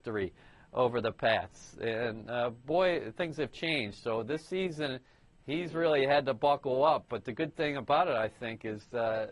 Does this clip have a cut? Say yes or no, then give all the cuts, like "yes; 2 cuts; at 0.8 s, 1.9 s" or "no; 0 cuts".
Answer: no; 0 cuts